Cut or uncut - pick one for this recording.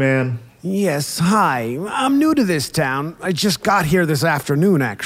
uncut